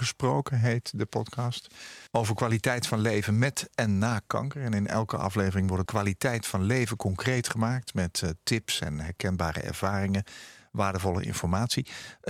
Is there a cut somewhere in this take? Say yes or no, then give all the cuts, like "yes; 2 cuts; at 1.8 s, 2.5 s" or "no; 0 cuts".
yes; 2 cuts; at 2.1 s, 5.9 s